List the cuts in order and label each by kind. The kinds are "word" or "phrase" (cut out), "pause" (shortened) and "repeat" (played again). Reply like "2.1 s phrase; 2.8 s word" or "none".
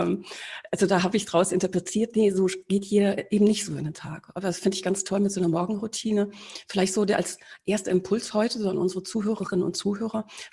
none